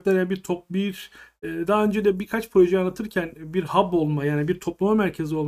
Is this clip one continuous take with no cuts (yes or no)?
yes